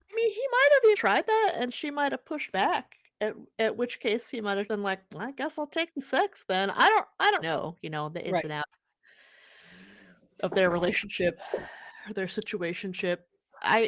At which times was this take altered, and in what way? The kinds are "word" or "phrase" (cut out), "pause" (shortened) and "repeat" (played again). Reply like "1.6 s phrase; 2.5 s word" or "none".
0.9 s word; 4.7 s word; 7.4 s word